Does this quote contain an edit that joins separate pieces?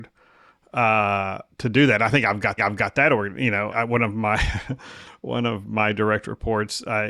yes; 3 cuts; at 1.5 s, 2.6 s, 3.7 s

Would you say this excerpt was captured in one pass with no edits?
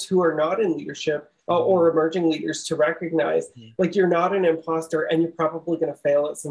no; 1 cut; at 1.4 s

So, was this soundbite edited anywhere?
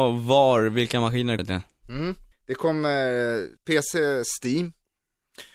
yes; 3 cuts; at 1.4 s, 2.3 s, 3.6 s

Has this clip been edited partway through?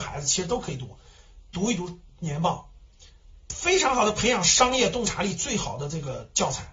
no; 0 cuts

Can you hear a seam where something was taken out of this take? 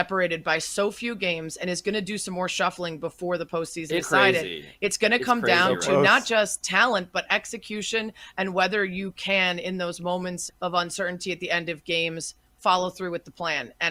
yes; 2 cuts; at 4.0 s, 10.5 s

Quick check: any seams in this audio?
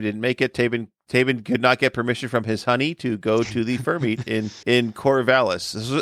yes; 1 cut; at 4.6 s

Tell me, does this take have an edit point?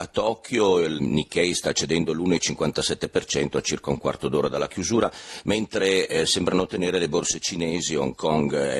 yes; 1 cut; at 1.0 s

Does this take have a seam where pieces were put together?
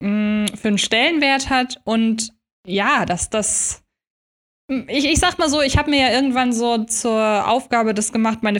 no; 0 cuts

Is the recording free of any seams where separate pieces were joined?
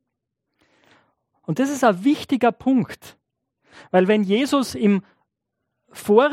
yes; 0 cuts

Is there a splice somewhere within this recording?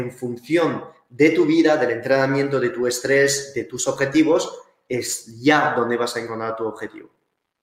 no; 0 cuts

